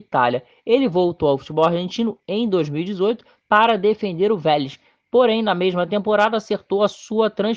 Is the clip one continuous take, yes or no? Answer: yes